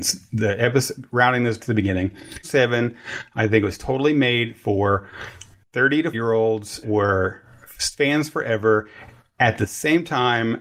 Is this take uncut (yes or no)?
no